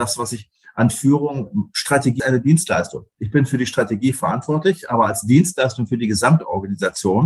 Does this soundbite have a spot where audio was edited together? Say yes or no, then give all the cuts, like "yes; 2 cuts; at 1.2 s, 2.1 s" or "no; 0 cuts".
yes; 1 cut; at 2.2 s